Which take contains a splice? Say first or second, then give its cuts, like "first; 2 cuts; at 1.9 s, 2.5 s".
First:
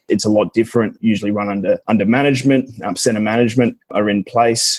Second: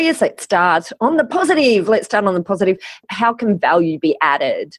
first; 2 cuts; at 1.8 s, 3.8 s